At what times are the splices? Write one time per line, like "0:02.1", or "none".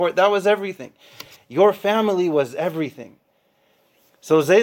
none

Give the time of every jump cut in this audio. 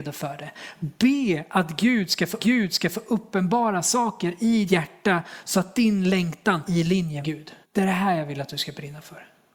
0:02.4
0:04.7
0:06.6
0:07.2
0:07.6

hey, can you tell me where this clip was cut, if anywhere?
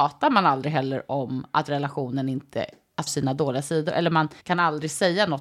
0:03.1
0:04.4

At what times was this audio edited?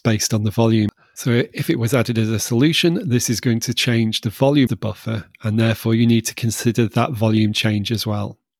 0:04.7

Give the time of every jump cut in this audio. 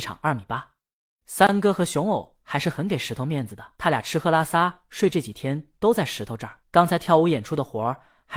0:03.8
0:06.6

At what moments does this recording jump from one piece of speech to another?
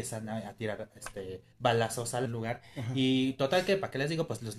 0:01.5
0:02.3

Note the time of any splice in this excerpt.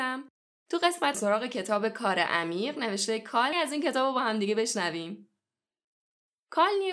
0:01.1
0:03.5

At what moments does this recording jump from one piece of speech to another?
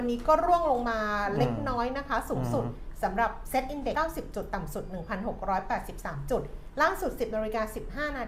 0:03.9

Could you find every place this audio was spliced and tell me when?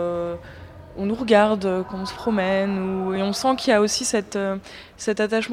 none

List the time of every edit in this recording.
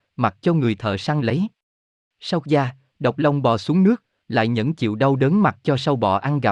0:01.2
0:02.4

